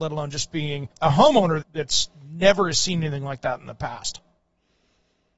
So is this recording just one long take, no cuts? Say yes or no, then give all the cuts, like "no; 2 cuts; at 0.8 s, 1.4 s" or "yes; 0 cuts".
no; 2 cuts; at 0.9 s, 1.6 s